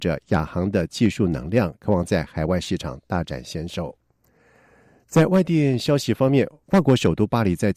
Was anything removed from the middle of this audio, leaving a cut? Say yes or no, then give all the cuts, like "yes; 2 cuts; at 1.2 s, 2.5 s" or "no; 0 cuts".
no; 0 cuts